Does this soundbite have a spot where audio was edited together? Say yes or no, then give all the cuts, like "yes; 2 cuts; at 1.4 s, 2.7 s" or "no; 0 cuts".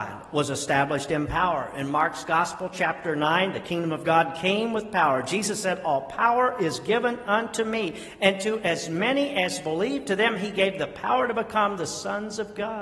no; 0 cuts